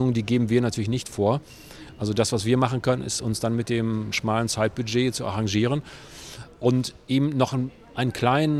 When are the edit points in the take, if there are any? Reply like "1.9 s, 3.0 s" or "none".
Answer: none